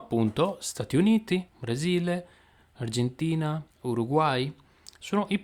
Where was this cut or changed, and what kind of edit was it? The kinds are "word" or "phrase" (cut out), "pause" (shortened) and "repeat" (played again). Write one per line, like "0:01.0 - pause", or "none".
0:01.5 - pause
0:03.7 - pause

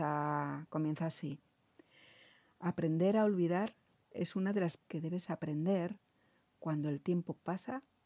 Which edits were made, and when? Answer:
0:04.8 - phrase

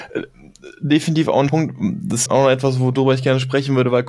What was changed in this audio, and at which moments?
0:01.5 - word
0:02.3 - word

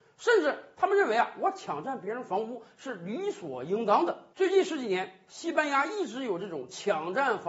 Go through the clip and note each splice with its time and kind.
0:04.3 - pause

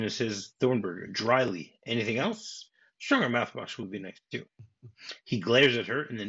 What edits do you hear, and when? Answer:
none

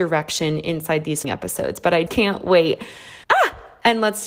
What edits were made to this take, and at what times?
0:01.2 - word
0:02.1 - word
0:03.2 - pause

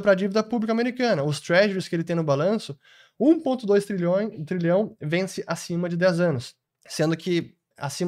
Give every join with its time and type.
0:06.6 - pause

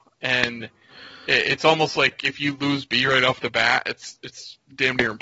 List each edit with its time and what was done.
none

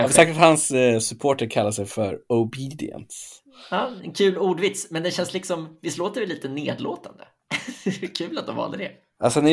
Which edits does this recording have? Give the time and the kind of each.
none

